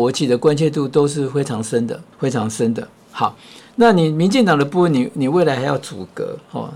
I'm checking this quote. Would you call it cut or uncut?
cut